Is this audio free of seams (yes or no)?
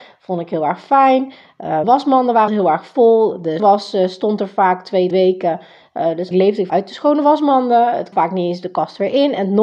no